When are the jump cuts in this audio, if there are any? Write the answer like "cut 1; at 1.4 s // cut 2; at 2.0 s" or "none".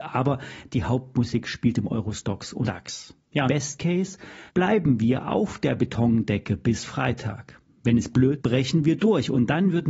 cut 1; at 2.6 s // cut 2; at 3.5 s // cut 3; at 4.5 s // cut 4; at 8.4 s